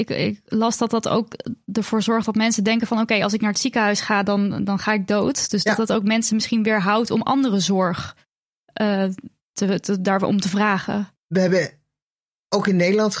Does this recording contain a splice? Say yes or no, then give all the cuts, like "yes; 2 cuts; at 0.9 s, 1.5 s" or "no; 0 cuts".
no; 0 cuts